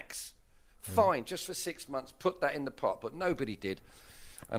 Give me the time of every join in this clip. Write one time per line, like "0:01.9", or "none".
none